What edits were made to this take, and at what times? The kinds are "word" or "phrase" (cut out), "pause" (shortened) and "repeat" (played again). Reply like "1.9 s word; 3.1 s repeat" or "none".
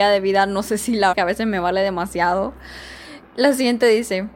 1.1 s word